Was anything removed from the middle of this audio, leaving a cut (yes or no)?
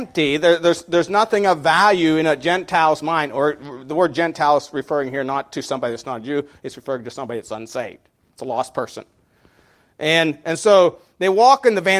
no